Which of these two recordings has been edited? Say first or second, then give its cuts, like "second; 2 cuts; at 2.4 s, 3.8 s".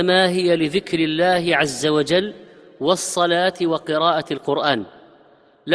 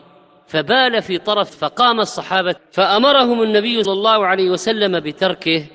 second; 3 cuts; at 1.5 s, 2.6 s, 3.8 s